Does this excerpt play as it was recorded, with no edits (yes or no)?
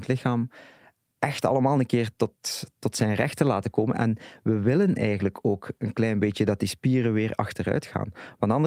yes